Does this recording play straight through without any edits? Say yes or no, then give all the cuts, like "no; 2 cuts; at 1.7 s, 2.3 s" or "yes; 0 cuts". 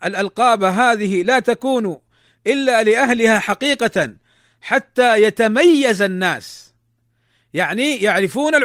yes; 0 cuts